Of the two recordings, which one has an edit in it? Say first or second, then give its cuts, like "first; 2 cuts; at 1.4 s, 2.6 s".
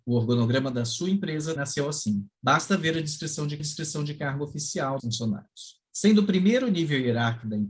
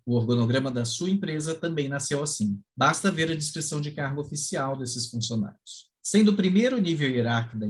first; 3 cuts; at 1.6 s, 3.6 s, 5.0 s